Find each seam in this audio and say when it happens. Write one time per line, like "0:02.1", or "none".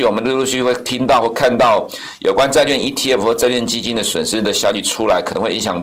none